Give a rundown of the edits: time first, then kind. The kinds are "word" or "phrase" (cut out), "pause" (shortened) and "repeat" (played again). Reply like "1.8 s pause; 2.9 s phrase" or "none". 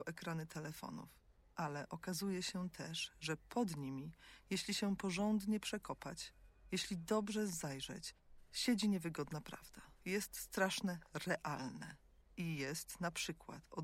1.4 s pause; 10.0 s pause; 12.2 s pause